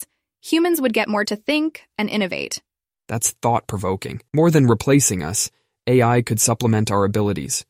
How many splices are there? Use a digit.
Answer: 4